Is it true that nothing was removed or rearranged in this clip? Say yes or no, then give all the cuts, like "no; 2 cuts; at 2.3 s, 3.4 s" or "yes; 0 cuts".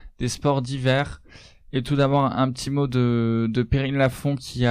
yes; 0 cuts